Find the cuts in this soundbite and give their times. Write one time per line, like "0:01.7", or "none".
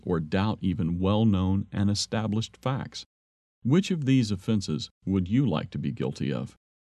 none